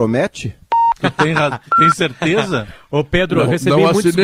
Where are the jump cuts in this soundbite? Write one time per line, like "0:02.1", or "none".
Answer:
none

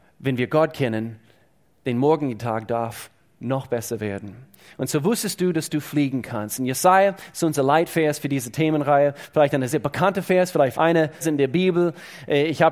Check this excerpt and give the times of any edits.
0:09.7
0:10.7
0:11.2

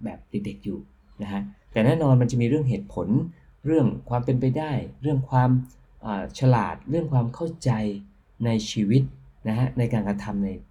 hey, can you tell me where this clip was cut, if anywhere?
none

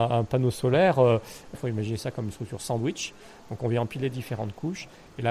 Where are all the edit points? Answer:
none

